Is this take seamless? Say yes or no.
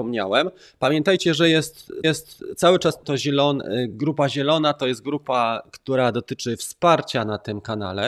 no